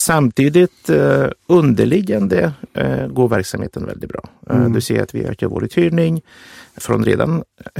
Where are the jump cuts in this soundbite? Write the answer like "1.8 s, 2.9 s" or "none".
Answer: 6.8 s